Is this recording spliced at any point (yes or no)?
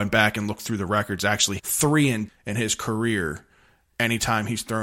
yes